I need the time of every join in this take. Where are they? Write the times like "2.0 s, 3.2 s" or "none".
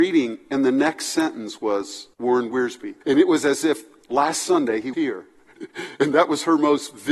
2.1 s, 3.0 s, 4.9 s